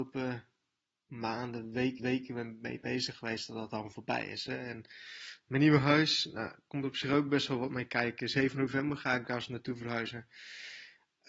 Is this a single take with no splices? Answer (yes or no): no